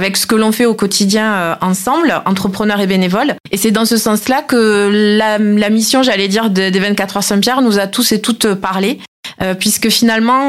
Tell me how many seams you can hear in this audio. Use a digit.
1